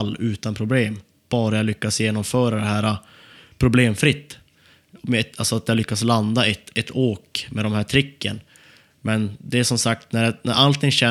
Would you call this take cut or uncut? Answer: uncut